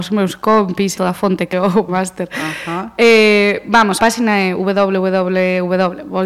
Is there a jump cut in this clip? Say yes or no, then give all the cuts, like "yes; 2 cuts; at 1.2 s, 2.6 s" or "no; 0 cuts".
yes; 4 cuts; at 1.0 s, 1.5 s, 1.9 s, 4.0 s